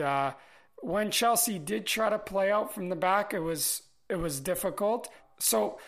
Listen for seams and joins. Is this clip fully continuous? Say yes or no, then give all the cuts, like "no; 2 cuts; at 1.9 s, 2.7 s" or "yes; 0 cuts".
yes; 0 cuts